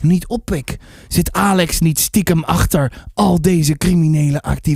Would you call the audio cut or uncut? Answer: uncut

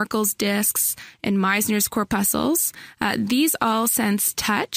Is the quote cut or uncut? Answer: uncut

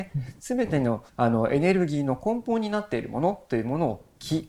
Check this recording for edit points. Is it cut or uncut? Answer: cut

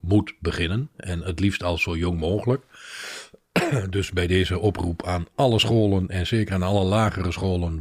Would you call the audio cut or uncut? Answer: uncut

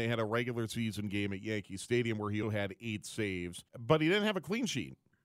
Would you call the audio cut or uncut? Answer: cut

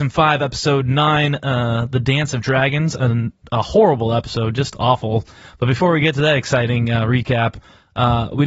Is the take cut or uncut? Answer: uncut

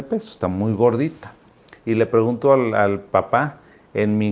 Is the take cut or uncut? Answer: uncut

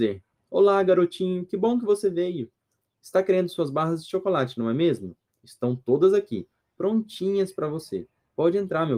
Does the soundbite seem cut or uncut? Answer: uncut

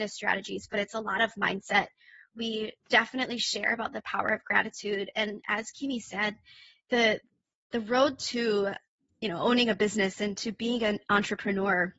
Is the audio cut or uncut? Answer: uncut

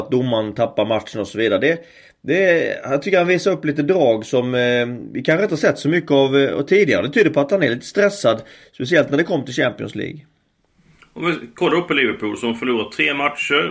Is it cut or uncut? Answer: uncut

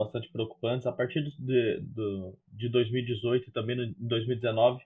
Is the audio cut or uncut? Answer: uncut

